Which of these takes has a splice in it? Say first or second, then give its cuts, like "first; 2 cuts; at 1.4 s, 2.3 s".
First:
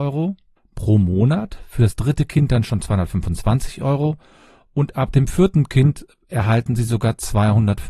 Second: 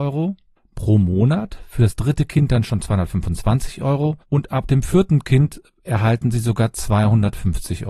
second; 1 cut; at 4.2 s